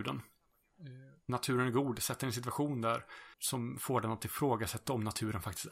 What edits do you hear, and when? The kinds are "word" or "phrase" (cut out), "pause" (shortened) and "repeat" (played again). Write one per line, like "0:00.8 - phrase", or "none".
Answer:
0:03.3 - pause

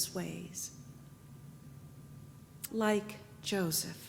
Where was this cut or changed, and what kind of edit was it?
0:02.7 - word

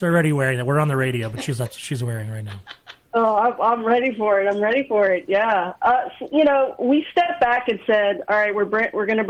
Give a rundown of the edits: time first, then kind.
0:03.1 - pause

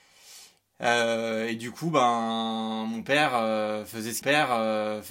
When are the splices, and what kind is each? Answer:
0:04.2 - repeat

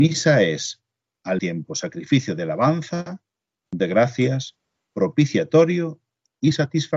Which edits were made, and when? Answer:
0:01.4 - word
0:03.8 - word

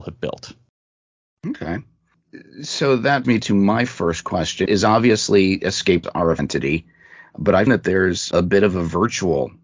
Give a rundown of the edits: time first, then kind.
0:03.2 - word
0:04.7 - word
0:06.0 - word
0:06.4 - word
0:07.7 - word
0:08.3 - word

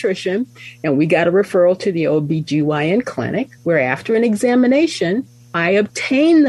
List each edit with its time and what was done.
0:03.6 - pause

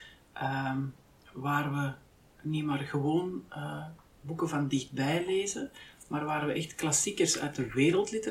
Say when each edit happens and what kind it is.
none

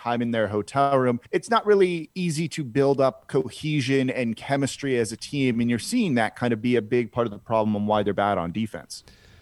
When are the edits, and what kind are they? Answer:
0:01.2 - pause

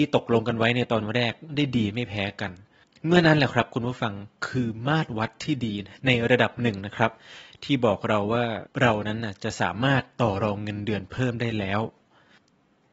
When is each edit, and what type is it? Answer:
none

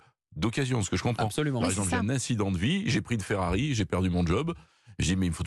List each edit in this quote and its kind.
none

